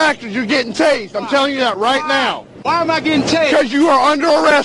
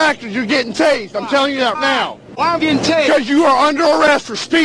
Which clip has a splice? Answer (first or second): second